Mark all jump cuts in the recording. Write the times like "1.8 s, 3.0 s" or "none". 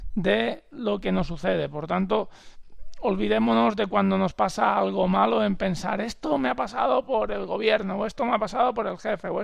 none